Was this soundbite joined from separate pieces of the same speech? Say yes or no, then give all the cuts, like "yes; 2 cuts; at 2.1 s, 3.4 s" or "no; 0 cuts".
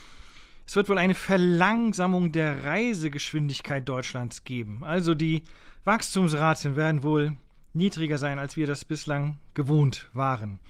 no; 0 cuts